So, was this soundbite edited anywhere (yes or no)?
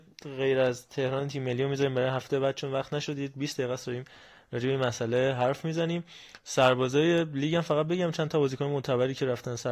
no